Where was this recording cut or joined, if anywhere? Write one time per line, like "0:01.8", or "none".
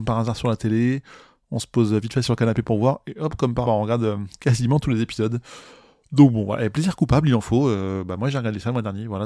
0:03.6